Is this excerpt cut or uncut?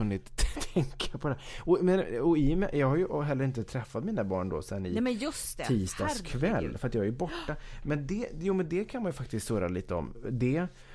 uncut